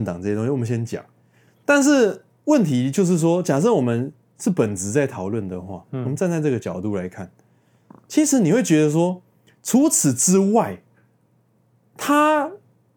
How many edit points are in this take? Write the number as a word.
zero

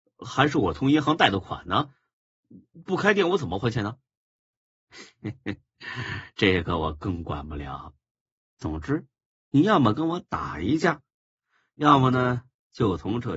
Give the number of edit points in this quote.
zero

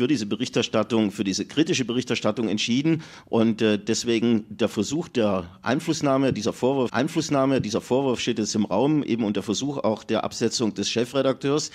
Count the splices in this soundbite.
one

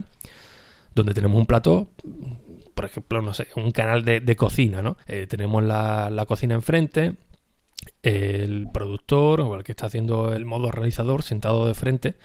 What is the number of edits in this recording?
two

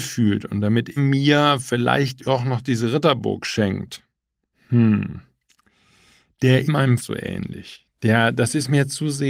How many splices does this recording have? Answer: four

